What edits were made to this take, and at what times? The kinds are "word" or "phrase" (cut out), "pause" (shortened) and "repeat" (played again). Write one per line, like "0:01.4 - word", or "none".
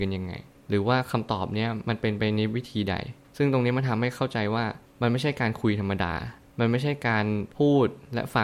0:07.5 - pause

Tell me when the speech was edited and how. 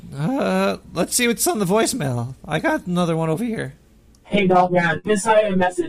none

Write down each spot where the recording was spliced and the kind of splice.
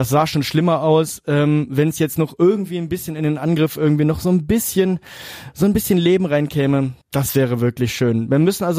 0:07.0 - pause

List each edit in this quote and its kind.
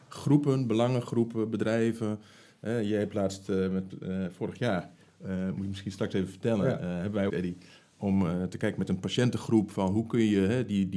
0:07.3 - phrase

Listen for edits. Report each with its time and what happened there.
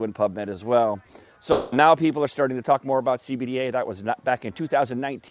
none

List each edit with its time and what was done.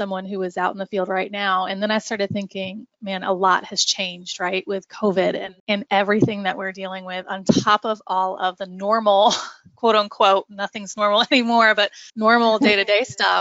0:05.6 - pause
0:12.1 - pause

